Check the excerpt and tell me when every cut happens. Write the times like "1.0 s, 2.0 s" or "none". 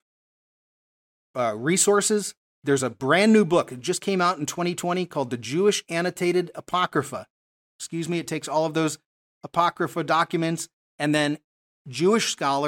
none